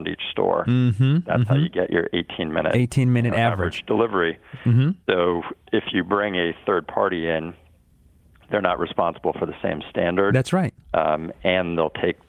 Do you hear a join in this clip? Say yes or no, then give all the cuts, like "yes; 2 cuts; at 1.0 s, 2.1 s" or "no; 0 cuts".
no; 0 cuts